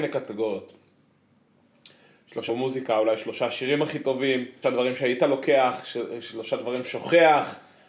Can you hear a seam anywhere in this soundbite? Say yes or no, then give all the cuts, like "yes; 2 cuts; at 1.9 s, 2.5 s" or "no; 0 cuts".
yes; 3 cuts; at 2.5 s, 4.6 s, 6.8 s